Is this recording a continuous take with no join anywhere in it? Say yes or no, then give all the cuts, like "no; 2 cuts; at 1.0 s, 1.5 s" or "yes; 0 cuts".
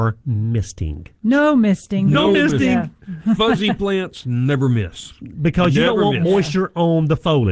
no; 1 cut; at 1.2 s